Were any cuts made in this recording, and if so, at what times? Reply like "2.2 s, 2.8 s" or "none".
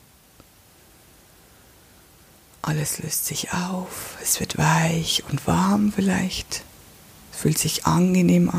none